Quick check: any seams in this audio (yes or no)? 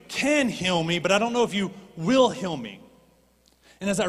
no